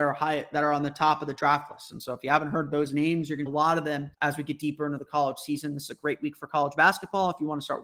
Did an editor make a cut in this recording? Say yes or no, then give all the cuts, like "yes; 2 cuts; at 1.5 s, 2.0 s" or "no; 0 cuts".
yes; 2 cuts; at 3.5 s, 4.1 s